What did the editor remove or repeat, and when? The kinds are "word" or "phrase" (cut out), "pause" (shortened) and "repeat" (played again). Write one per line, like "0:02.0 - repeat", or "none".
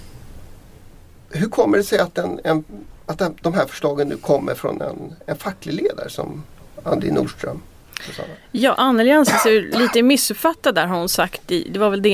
none